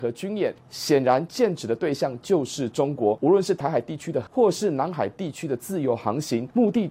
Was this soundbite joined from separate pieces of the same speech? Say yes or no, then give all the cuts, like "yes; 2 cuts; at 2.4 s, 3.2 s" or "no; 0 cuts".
yes; 1 cut; at 4.3 s